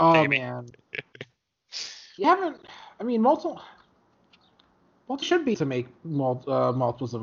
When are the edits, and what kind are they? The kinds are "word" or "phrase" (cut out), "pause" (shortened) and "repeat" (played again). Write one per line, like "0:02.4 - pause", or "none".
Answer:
0:02.2 - word
0:05.2 - word
0:05.5 - word